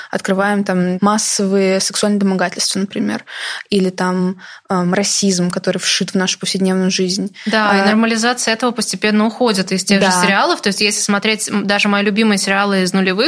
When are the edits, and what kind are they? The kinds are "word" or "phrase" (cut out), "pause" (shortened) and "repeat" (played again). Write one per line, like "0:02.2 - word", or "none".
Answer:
none